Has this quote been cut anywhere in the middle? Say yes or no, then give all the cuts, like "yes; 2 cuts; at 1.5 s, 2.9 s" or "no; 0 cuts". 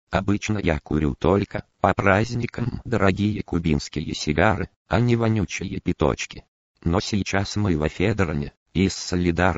no; 0 cuts